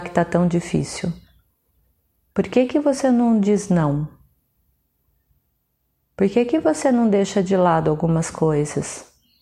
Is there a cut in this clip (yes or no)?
no